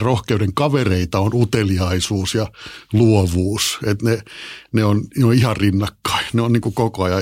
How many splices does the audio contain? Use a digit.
0